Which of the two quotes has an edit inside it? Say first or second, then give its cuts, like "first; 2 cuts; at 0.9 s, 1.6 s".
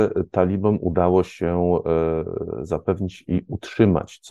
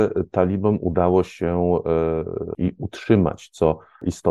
second; 1 cut; at 2.5 s